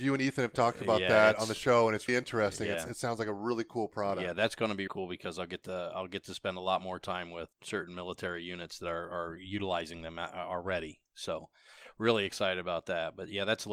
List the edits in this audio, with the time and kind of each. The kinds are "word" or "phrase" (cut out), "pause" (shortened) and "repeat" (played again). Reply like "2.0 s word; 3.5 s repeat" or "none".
2.1 s word; 4.9 s word; 7.5 s word